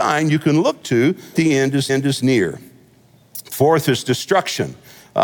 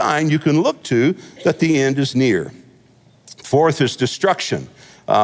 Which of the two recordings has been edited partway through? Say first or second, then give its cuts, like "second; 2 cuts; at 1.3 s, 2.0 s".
first; 2 cuts; at 1.3 s, 1.9 s